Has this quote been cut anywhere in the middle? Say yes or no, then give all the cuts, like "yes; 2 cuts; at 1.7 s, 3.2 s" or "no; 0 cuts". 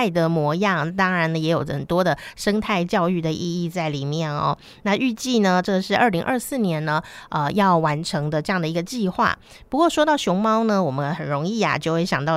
no; 0 cuts